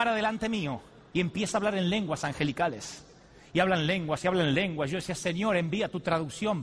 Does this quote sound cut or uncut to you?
uncut